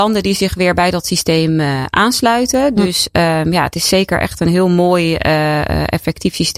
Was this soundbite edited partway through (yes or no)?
no